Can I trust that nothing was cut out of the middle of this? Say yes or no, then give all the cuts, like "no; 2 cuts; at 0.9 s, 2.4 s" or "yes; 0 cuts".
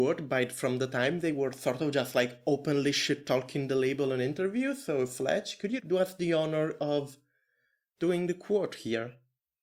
yes; 0 cuts